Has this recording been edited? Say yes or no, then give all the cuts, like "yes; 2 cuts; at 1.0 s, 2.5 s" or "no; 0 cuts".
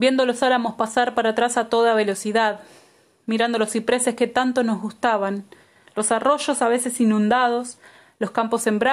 no; 0 cuts